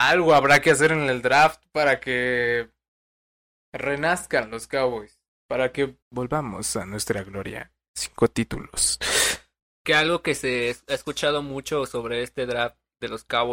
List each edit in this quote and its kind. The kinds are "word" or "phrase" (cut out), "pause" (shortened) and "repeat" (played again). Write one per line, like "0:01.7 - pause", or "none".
0:06.0 - pause